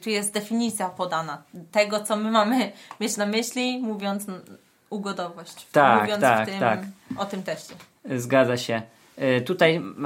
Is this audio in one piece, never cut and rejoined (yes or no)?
yes